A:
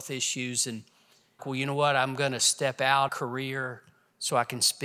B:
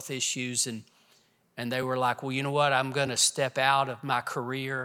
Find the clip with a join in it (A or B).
A